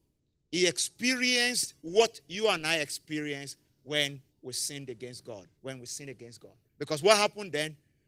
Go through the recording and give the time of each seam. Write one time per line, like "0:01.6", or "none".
0:01.8
0:04.3
0:05.6
0:06.7